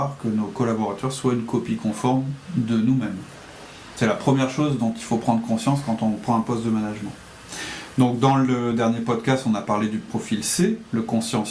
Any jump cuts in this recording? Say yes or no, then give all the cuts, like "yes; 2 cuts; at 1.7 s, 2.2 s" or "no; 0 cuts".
no; 0 cuts